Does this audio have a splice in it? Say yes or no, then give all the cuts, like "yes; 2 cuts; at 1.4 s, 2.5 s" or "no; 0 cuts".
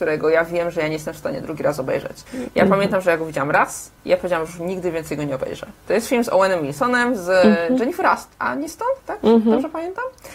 yes; 3 cuts; at 2.3 s, 4.0 s, 5.8 s